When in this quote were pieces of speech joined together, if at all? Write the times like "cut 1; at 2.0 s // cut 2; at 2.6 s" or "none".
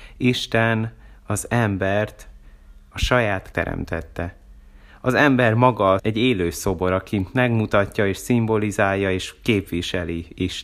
cut 1; at 3.5 s // cut 2; at 6.0 s